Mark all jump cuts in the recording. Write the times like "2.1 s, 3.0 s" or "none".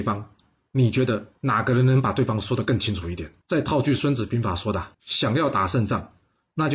3.4 s, 4.9 s